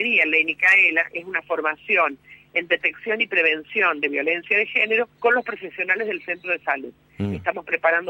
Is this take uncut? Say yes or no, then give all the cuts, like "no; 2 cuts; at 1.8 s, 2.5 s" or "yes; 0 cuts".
no; 1 cut; at 5.1 s